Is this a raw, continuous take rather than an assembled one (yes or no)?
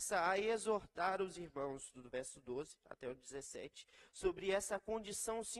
yes